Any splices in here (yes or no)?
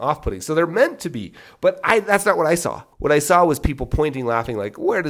yes